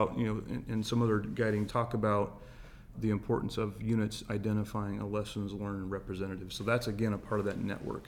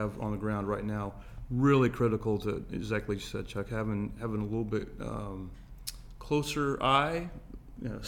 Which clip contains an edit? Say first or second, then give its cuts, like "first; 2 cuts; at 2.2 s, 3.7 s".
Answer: first; 2 cuts; at 1.7 s, 2.9 s